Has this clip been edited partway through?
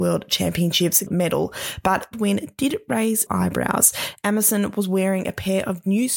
yes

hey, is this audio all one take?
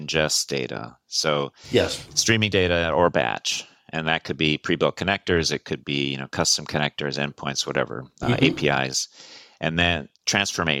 yes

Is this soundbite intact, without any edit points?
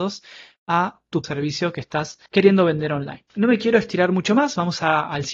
no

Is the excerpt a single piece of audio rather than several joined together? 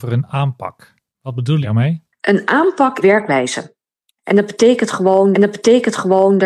no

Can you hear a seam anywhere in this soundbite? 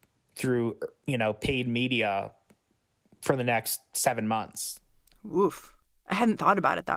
no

